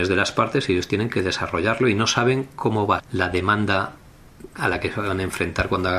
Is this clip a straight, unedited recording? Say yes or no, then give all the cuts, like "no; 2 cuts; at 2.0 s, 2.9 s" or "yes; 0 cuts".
no; 1 cut; at 3.0 s